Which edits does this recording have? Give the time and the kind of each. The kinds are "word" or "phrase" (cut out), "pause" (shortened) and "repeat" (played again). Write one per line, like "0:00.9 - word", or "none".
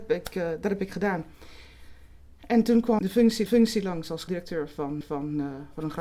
0:03.0 - word
0:03.5 - repeat
0:04.3 - word
0:05.0 - repeat

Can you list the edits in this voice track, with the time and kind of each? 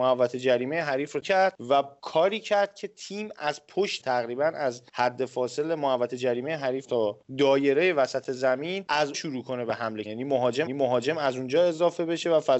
0:01.2 - phrase
0:04.0 - word
0:04.9 - pause
0:09.1 - word
0:10.0 - word
0:10.7 - repeat

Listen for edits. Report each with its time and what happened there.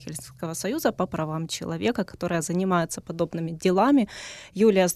none

